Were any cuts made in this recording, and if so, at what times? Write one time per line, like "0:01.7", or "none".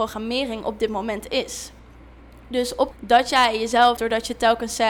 0:02.9
0:04.0